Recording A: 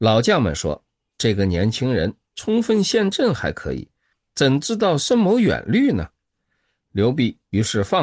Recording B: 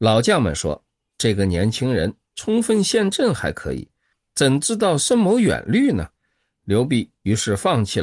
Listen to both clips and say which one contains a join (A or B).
B